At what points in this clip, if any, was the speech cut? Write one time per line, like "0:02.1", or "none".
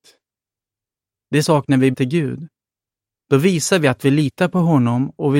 0:01.4
0:01.9